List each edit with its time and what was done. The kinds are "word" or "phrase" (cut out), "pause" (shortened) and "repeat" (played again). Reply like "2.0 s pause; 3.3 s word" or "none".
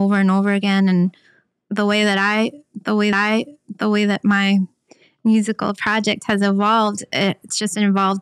3.1 s repeat

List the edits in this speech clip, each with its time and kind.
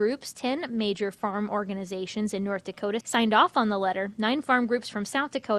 none

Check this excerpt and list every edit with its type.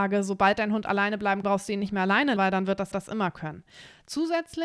1.4 s word; 2.4 s word; 2.9 s repeat

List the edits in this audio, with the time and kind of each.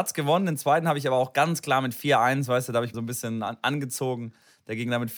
2.9 s word

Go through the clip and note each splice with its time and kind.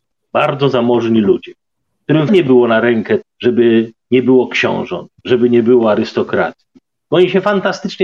2.3 s word; 3.2 s word; 5.2 s pause

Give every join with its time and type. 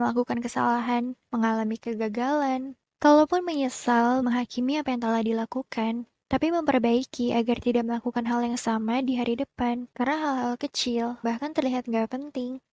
4.2 s word; 9.9 s pause; 11.2 s word

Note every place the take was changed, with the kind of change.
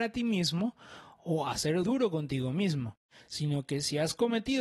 1.8 s word

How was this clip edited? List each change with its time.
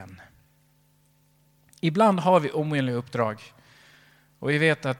none

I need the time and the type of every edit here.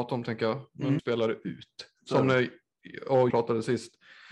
1.0 s phrase; 3.3 s word

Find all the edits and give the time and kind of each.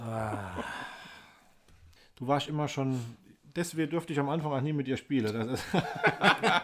2.0 s pause

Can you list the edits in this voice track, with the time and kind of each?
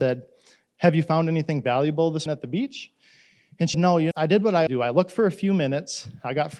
2.3 s word; 3.7 s word; 4.1 s word; 4.7 s word

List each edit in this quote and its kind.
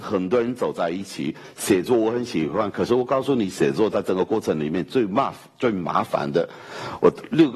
none

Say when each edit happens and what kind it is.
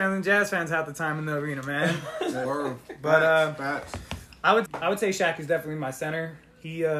2.4 s word; 4.7 s word

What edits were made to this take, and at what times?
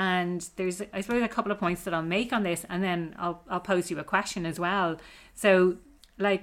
none

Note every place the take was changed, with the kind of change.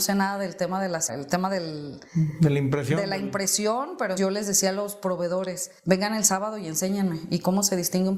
1.1 s phrase; 2.1 s pause; 4.2 s word; 5.8 s pause

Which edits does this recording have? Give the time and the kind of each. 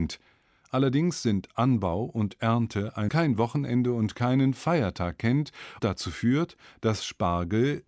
3.1 s phrase; 5.8 s word

